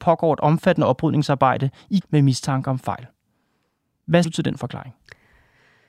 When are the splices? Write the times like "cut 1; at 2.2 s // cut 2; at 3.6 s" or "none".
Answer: cut 1; at 2.0 s // cut 2; at 4.2 s